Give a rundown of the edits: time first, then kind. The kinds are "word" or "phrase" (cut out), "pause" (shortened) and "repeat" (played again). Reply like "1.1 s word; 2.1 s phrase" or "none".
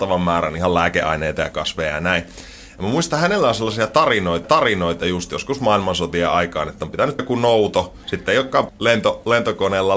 4.4 s repeat; 7.2 s word; 8.0 s pause; 8.7 s word